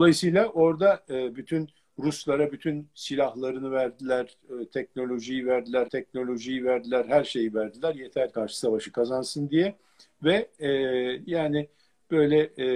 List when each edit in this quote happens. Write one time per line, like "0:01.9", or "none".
0:05.9
0:08.3